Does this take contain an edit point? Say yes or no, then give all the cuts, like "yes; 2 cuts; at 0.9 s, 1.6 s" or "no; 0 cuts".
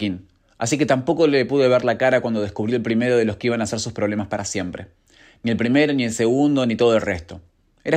no; 0 cuts